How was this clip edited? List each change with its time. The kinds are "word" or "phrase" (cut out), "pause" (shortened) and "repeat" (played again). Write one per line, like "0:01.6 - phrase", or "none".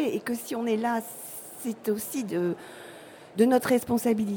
none